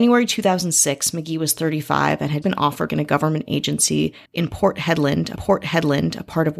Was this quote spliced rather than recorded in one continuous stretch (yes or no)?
yes